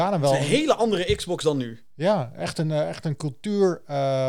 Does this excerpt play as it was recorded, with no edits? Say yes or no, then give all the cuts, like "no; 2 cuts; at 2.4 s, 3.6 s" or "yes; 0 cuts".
yes; 0 cuts